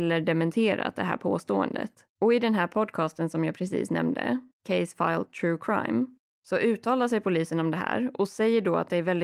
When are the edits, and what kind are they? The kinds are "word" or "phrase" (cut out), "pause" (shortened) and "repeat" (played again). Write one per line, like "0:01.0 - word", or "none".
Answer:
0:02.1 - pause